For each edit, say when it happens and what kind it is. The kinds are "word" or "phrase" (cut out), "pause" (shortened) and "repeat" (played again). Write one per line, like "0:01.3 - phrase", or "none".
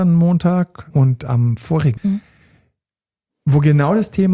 0:00.9 - word
0:02.0 - word